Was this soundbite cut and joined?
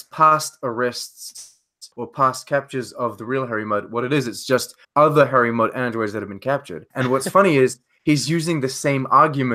yes; 3 cuts; at 1.9 s, 4.8 s, 6.9 s

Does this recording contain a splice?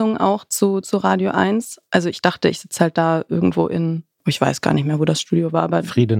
yes; 1 cut; at 4.1 s

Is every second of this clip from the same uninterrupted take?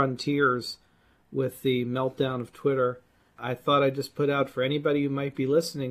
yes; 0 cuts

